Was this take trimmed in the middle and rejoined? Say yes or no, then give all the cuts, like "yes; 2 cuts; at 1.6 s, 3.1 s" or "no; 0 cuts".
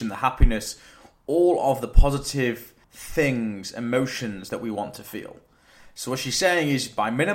yes; 1 cut; at 2.8 s